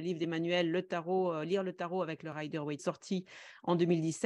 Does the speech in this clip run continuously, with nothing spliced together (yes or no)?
no